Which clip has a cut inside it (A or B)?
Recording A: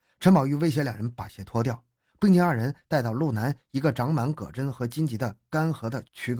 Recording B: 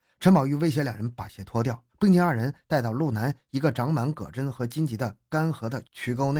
B